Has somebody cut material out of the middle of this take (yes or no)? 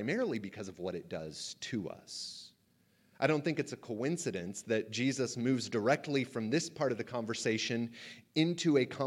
no